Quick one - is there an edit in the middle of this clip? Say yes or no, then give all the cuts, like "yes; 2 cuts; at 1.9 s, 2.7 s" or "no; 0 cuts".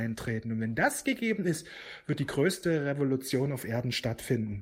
no; 0 cuts